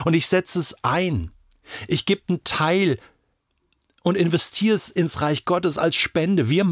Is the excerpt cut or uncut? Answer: uncut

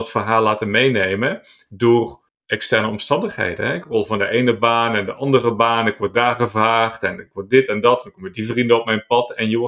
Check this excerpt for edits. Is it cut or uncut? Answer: cut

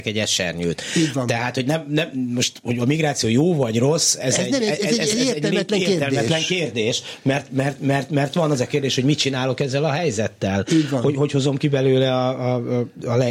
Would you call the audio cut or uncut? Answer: uncut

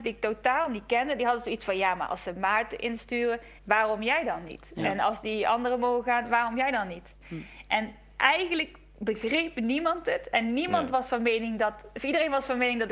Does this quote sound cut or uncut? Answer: cut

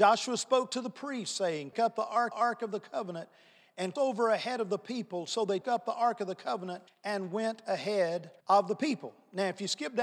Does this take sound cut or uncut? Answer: cut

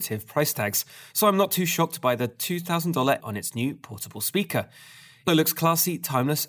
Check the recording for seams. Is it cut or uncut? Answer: cut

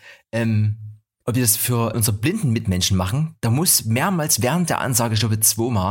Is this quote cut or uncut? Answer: uncut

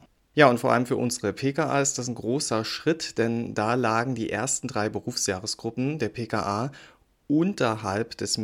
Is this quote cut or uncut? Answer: uncut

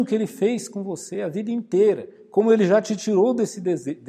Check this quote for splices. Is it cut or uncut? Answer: uncut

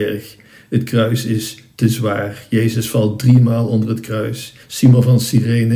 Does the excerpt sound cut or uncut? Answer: cut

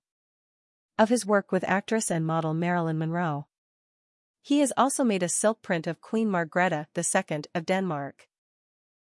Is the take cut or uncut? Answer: uncut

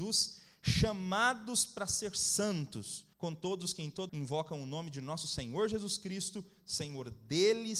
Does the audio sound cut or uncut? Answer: cut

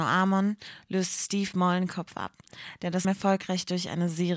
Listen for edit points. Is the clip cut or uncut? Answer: cut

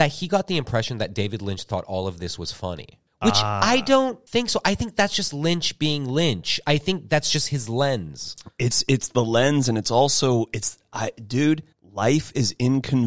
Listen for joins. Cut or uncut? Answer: cut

